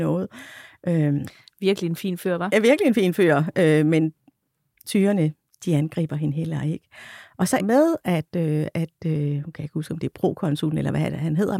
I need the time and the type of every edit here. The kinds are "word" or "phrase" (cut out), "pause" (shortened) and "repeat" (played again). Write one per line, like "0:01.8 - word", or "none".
0:07.6 - phrase